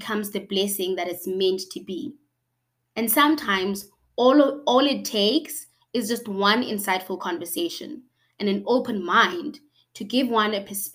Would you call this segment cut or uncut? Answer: uncut